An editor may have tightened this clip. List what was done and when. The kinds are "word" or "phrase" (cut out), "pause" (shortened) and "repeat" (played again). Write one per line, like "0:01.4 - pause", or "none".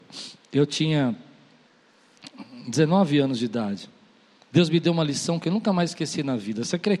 none